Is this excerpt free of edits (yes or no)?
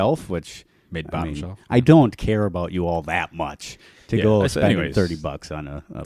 yes